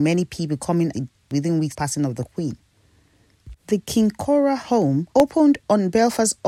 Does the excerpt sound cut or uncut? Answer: cut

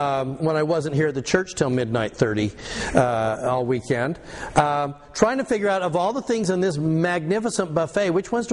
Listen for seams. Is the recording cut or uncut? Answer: uncut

